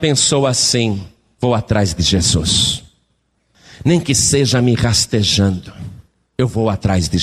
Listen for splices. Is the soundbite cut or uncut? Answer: uncut